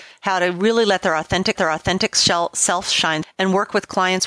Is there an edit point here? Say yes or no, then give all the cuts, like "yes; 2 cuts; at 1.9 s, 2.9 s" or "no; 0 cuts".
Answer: yes; 2 cuts; at 1.6 s, 3.2 s